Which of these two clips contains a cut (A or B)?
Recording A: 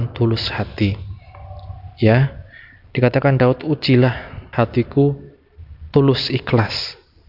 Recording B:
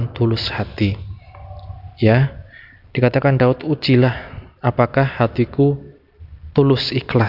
A